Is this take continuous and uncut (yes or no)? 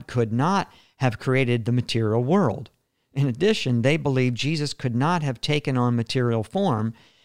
yes